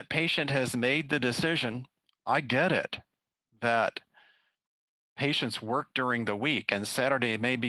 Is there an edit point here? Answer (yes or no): no